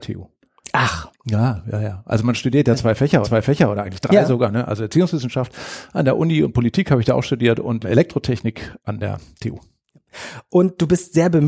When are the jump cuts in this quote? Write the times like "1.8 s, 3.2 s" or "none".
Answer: 3.2 s, 7.8 s